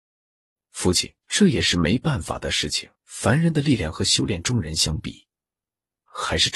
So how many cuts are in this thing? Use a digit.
2